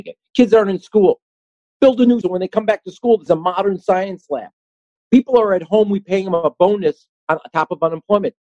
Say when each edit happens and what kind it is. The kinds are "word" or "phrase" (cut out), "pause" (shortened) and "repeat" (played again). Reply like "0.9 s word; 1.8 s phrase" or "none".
2.2 s phrase; 3.3 s phrase